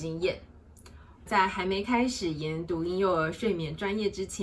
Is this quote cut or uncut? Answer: cut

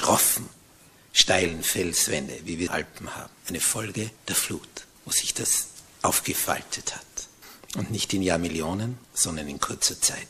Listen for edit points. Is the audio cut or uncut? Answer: cut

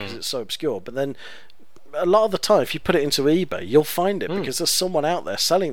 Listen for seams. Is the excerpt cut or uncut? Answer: uncut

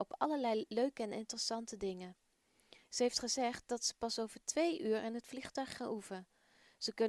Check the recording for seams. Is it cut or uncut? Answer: uncut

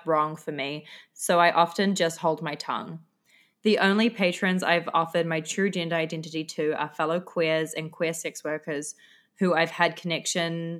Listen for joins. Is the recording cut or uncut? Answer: uncut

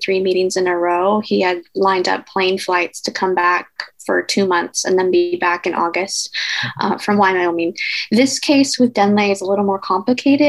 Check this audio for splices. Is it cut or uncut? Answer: uncut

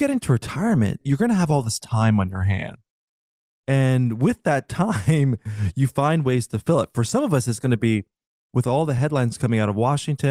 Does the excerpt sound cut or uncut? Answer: uncut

